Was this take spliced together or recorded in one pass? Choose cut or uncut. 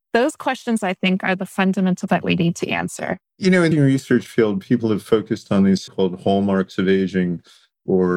cut